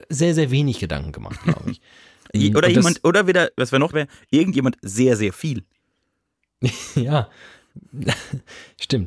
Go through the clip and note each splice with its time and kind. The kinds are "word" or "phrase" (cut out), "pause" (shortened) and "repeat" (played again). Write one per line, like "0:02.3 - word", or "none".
0:02.3 - word
0:03.9 - word